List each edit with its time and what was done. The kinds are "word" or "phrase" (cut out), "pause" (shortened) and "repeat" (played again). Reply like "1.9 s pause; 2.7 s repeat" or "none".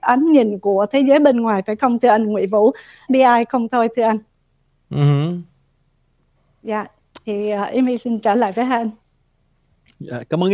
3.1 s phrase